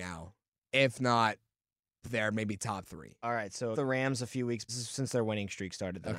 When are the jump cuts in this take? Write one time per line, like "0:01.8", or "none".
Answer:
0:02.0
0:03.7
0:04.7